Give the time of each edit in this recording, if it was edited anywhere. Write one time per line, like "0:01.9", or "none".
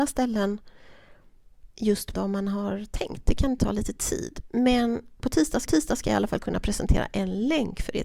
0:01.7
0:02.1
0:03.6
0:05.7